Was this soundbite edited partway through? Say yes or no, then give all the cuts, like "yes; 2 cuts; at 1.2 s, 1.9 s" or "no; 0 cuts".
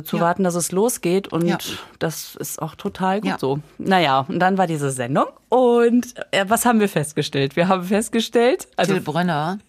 no; 0 cuts